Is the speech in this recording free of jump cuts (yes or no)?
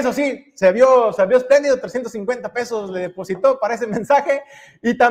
yes